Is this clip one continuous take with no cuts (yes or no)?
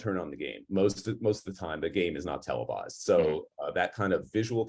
yes